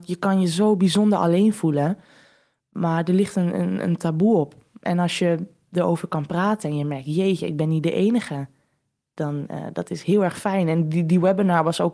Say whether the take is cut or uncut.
uncut